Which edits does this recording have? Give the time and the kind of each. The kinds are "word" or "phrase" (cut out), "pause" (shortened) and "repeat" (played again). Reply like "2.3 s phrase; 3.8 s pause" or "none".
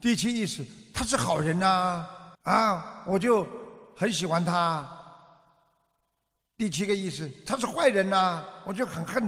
2.3 s pause